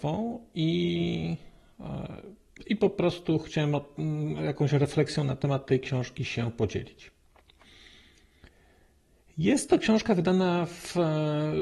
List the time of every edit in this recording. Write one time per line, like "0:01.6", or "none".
none